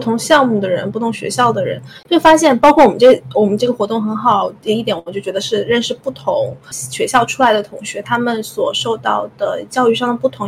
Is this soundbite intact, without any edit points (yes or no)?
no